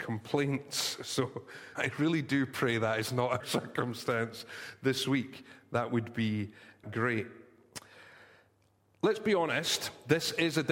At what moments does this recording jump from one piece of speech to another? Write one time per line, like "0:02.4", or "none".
0:01.8
0:03.4
0:06.8